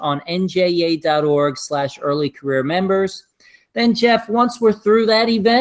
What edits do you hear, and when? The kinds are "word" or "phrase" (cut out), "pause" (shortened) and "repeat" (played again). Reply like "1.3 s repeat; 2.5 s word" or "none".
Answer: none